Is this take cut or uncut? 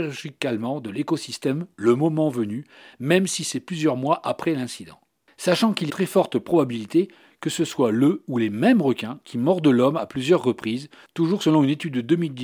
cut